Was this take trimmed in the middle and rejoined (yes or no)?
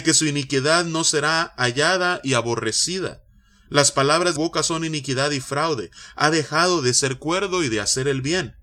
yes